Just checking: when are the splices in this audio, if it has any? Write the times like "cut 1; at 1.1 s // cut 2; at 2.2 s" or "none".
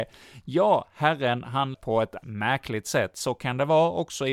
cut 1; at 1.7 s // cut 2; at 2.2 s

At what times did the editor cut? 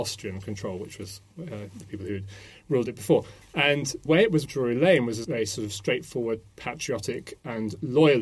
cut 1; at 4.1 s // cut 2; at 4.5 s // cut 3; at 5.2 s

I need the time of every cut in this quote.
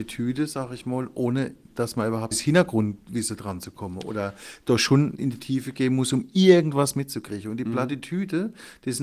cut 1; at 2.3 s

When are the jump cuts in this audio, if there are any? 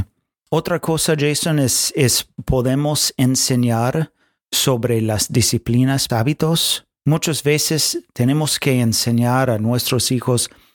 cut 1; at 6.1 s

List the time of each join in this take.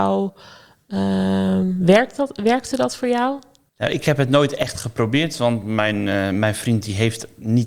none

